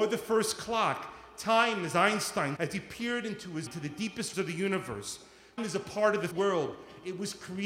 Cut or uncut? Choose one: cut